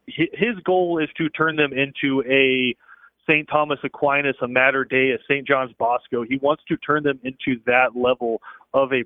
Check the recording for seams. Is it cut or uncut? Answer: uncut